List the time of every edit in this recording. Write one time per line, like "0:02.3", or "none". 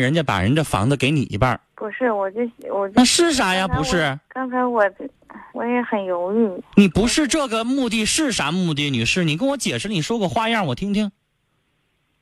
0:01.7
0:04.2
0:05.5